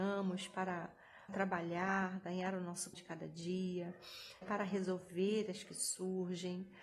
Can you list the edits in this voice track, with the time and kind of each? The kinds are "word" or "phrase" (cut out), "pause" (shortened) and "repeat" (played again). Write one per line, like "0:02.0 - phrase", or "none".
0:01.3 - word
0:02.9 - word
0:04.4 - word
0:05.6 - word